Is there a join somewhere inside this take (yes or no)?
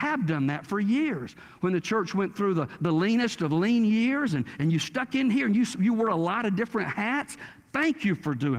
no